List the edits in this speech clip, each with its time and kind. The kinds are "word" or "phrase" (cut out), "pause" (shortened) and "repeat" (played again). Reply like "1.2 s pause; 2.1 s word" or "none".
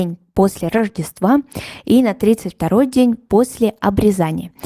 none